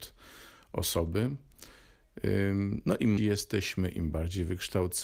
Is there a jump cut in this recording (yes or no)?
yes